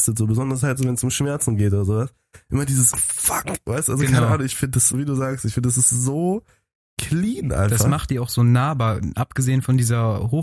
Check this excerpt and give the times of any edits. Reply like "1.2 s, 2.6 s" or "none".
2.9 s, 4.9 s